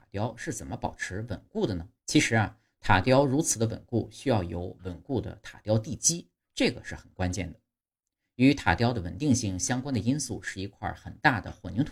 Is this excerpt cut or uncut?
cut